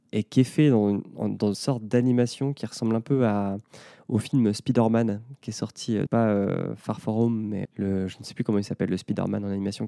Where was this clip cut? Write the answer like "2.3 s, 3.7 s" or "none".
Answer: 1.5 s, 6.1 s, 7.6 s